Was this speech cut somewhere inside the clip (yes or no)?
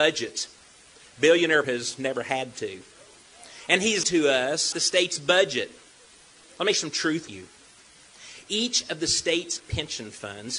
yes